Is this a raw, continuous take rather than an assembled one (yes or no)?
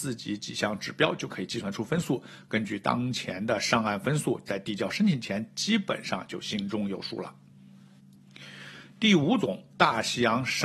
no